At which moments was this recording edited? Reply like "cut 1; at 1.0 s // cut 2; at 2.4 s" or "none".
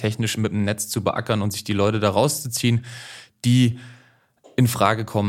none

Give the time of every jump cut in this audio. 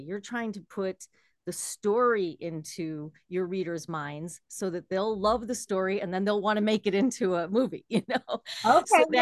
none

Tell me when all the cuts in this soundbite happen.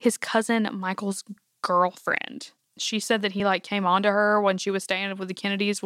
none

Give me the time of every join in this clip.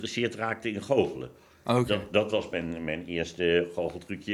none

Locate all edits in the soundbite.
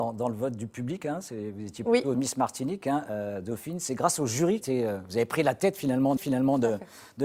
cut 1; at 2.1 s // cut 2; at 4.6 s // cut 3; at 6.2 s

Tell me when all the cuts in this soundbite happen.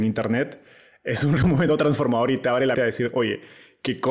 cut 1; at 1.4 s // cut 2; at 2.7 s

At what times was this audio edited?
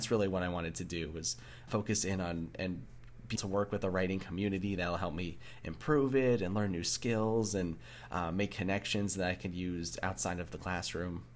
cut 1; at 1.7 s // cut 2; at 2.5 s // cut 3; at 3.4 s

